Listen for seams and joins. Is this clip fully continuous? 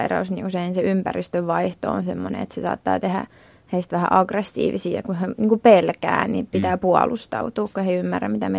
yes; 0 cuts

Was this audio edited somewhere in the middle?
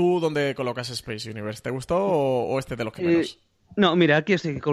no; 0 cuts

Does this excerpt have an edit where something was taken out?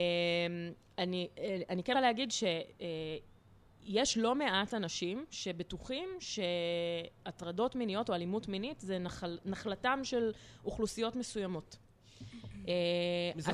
yes; 1 cut; at 1.9 s

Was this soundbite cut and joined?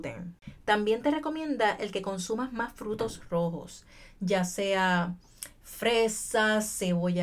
no; 0 cuts

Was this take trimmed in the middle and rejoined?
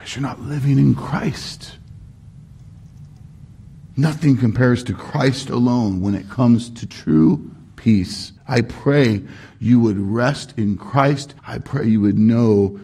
yes; 3 cuts; at 3.9 s, 8.4 s, 11.4 s

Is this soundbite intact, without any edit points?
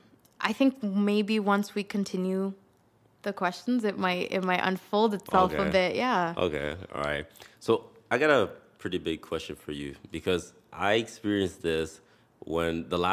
yes; 0 cuts

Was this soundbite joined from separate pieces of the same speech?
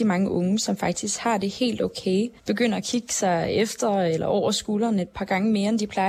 yes; 1 cut; at 2.4 s

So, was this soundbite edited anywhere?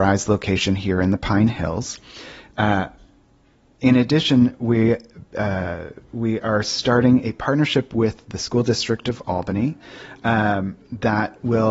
no; 0 cuts

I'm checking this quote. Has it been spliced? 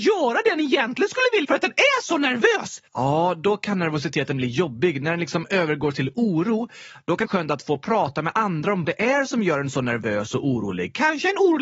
yes; 4 cuts; at 1.4 s, 2.9 s, 7.3 s, 8.8 s

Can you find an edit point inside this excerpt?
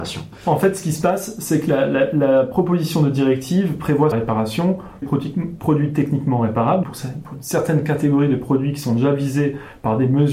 yes; 3 cuts; at 4.1 s, 5.0 s, 6.8 s

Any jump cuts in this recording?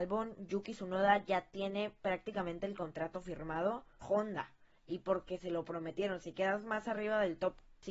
yes; 1 cut; at 4.0 s

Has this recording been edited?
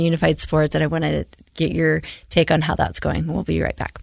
no; 0 cuts

